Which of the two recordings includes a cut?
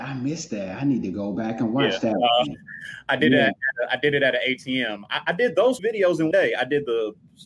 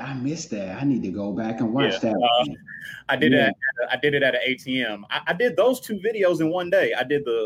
first; 2 cuts; at 5.8 s, 6.3 s

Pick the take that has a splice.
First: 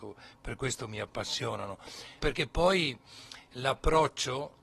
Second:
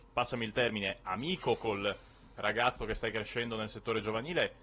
first; 1 cut; at 2.2 s

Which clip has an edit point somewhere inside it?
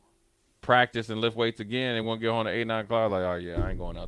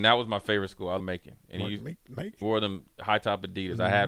second; 2 cuts; at 1.0 s, 2.4 s

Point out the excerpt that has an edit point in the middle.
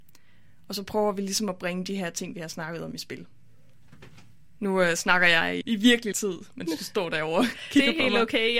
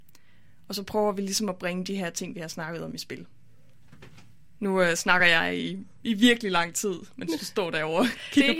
first; 2 cuts; at 5.6 s, 6.1 s

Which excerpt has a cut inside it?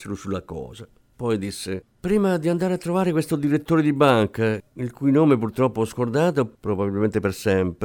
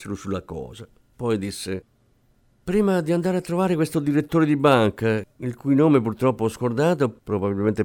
first; 1 cut; at 1.9 s

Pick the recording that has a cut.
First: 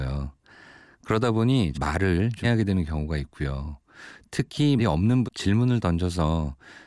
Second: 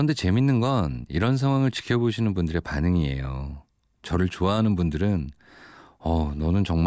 first; 4 cuts; at 1.7 s, 2.4 s, 4.8 s, 5.3 s

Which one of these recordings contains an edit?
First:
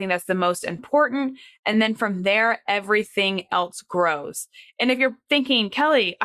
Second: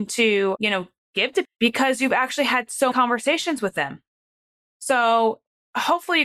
second; 2 cuts; at 1.4 s, 2.9 s

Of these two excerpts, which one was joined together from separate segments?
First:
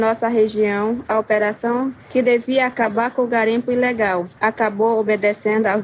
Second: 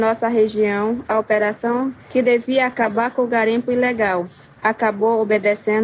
first; 1 cut; at 4.3 s

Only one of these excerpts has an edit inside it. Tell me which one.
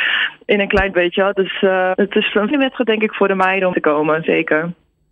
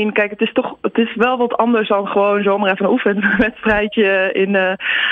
first; 4 cuts; at 0.9 s, 2.0 s, 2.5 s, 3.7 s

